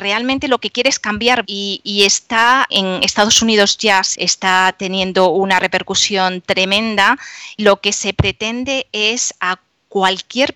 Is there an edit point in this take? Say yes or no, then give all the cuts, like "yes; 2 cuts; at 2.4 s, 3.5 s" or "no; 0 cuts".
yes; 4 cuts; at 1.4 s, 2.7 s, 4.1 s, 7.6 s